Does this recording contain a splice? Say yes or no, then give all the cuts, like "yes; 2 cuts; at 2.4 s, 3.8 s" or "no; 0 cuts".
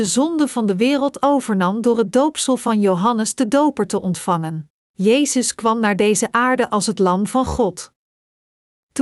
yes; 1 cut; at 4.8 s